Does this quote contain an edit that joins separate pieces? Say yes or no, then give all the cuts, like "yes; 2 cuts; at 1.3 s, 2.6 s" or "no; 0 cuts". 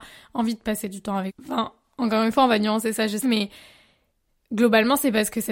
yes; 2 cuts; at 1.3 s, 3.2 s